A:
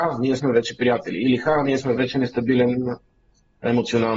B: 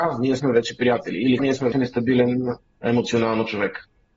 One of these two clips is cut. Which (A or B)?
B